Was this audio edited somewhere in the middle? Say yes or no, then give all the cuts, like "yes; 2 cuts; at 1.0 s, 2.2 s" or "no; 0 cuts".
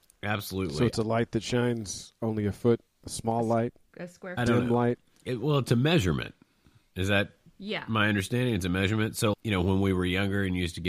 yes; 3 cuts; at 2.9 s, 4.4 s, 9.3 s